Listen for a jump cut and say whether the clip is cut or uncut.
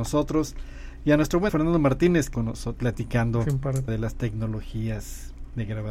cut